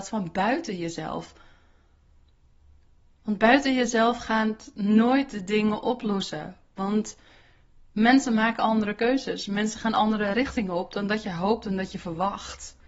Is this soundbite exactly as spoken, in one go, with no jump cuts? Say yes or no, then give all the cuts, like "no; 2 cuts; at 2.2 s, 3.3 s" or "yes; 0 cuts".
yes; 0 cuts